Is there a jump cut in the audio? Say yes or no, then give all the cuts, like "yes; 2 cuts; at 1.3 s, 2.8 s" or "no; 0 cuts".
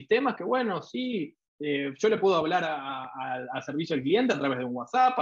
no; 0 cuts